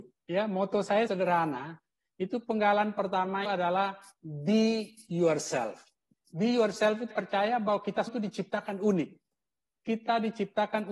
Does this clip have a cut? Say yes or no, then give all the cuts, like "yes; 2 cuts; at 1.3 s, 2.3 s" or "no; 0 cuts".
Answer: yes; 4 cuts; at 1.1 s, 3.4 s, 7.1 s, 8.1 s